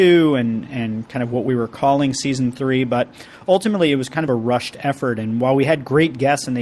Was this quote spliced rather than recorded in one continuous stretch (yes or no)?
no